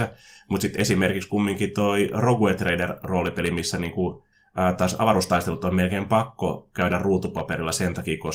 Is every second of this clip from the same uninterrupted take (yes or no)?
yes